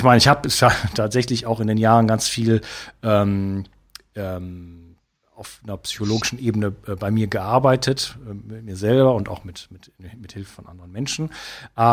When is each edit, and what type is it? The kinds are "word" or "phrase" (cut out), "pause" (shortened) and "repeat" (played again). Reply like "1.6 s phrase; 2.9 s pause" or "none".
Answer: none